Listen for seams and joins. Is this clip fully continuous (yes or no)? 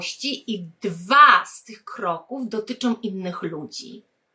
yes